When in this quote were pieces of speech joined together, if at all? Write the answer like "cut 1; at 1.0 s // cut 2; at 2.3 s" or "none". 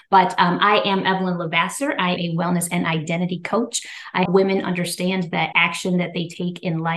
cut 1; at 2.2 s // cut 2; at 4.3 s // cut 3; at 5.5 s